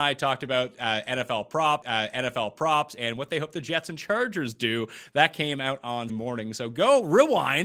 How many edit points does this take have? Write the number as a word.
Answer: two